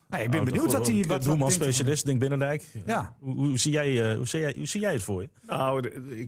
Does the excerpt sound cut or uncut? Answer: uncut